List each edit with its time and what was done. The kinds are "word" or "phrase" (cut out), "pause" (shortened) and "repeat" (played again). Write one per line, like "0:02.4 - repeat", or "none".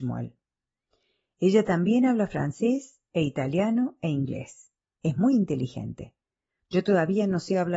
none

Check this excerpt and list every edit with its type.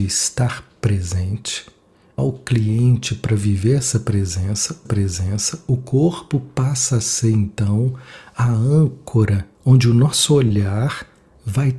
0:02.2 - phrase
0:04.9 - repeat
0:09.5 - pause

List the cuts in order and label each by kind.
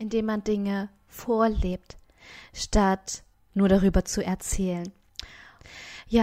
0:03.3 - pause

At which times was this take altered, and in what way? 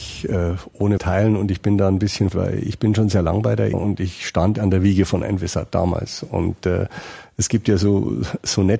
0:01.0 - word
0:02.3 - word
0:03.7 - word
0:04.6 - word

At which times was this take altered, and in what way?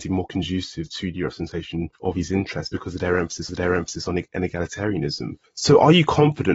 0:01.9 - pause
0:03.5 - repeat

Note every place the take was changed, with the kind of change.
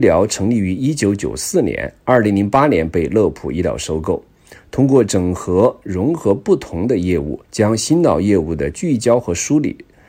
0:07.4 - pause

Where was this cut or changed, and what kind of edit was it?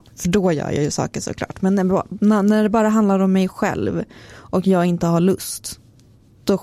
none

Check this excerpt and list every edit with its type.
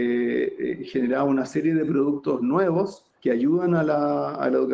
0:03.2 - pause

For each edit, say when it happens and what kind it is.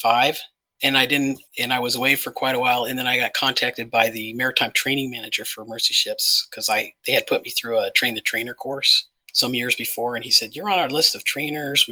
0:01.5 - pause
0:09.2 - pause

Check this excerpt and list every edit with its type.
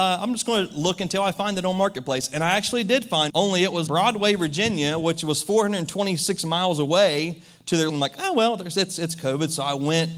0:03.3 - word
0:03.9 - word
0:07.9 - word

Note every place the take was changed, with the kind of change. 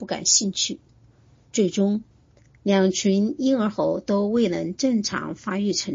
none

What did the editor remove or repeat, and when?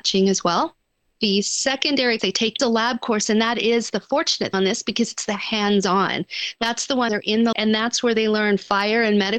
0:02.2 - word
0:02.6 - word
0:04.5 - word
0:07.1 - word
0:07.5 - word

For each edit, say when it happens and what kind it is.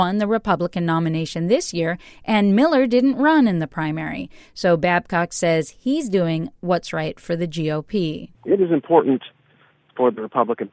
0:08.3 - pause

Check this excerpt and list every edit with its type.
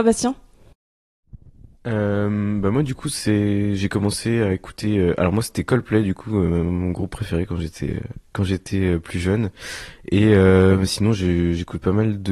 none

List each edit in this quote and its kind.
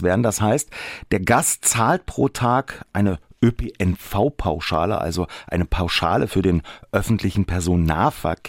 none

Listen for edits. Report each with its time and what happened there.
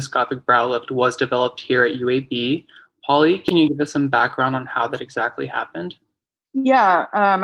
none

